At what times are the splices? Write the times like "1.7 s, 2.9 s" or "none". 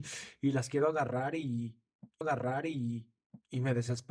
2.2 s